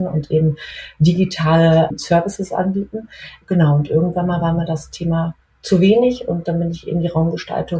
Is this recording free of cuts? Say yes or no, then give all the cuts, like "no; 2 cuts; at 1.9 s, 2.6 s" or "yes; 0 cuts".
yes; 0 cuts